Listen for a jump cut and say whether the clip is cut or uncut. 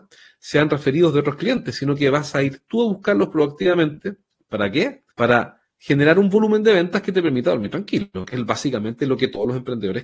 cut